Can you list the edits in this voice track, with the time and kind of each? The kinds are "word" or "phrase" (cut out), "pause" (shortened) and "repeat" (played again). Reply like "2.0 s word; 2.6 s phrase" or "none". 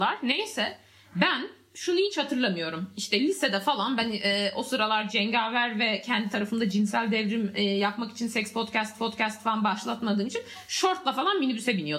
9.0 s repeat